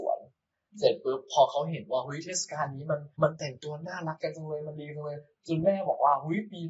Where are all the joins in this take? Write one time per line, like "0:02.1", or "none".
0:03.1